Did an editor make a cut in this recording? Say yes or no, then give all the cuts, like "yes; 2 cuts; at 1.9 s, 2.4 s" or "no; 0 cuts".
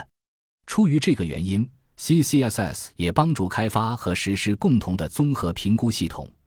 no; 0 cuts